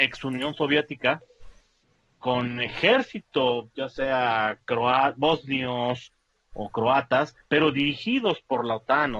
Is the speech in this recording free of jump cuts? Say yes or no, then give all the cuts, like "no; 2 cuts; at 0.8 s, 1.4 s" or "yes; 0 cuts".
yes; 0 cuts